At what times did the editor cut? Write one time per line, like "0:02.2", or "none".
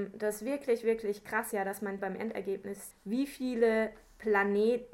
0:01.5
0:02.0
0:02.9